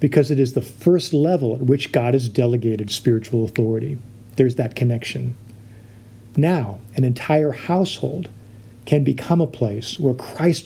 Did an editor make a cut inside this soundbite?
no; 0 cuts

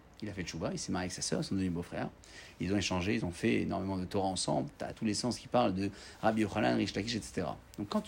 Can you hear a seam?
yes; 1 cut; at 4.9 s

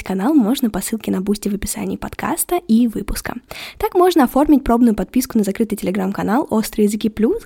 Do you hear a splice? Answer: no; 0 cuts

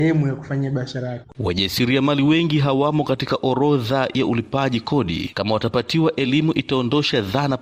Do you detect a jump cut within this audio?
no; 0 cuts

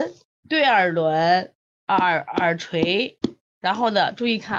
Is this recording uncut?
yes; 0 cuts

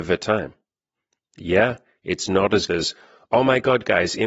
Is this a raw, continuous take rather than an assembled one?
no; 1 cut; at 2.7 s

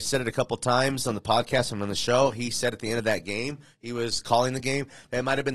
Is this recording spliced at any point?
no; 0 cuts

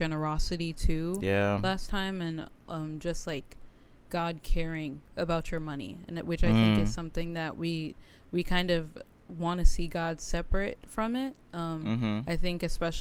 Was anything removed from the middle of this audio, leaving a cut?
no; 0 cuts

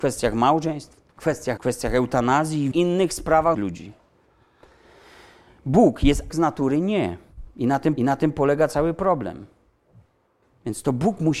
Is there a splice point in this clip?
yes; 6 cuts; at 1.1 s, 1.6 s, 2.7 s, 3.5 s, 6.3 s, 8.0 s

